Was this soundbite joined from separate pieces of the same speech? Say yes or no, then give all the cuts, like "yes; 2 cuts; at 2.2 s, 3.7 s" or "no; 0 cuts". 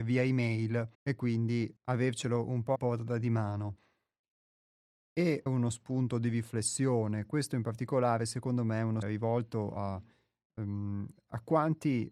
yes; 5 cuts; at 0.9 s, 1.8 s, 2.8 s, 5.5 s, 9.0 s